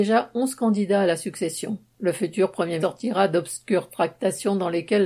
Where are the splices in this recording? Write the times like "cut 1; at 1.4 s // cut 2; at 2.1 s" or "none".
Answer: cut 1; at 2.8 s